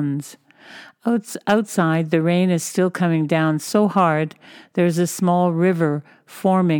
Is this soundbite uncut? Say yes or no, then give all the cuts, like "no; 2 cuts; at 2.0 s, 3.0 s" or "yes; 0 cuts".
yes; 0 cuts